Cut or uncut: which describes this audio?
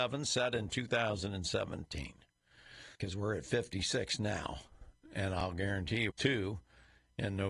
cut